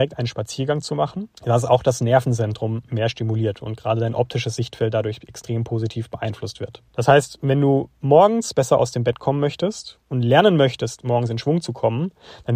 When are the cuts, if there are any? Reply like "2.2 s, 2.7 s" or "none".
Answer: 1.4 s, 6.9 s